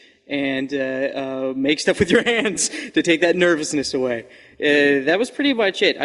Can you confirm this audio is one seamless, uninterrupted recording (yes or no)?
yes